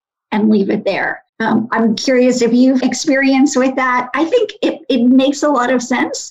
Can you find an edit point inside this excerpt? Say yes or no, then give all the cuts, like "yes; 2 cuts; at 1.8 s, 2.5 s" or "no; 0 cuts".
yes; 2 cuts; at 1.3 s, 2.8 s